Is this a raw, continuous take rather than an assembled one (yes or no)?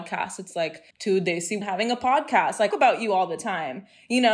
no